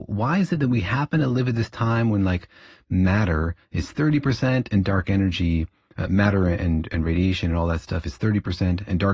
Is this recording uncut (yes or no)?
yes